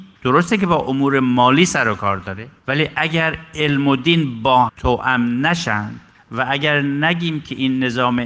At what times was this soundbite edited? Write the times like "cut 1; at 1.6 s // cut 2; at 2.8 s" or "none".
cut 1; at 2.6 s // cut 2; at 4.7 s // cut 3; at 6.1 s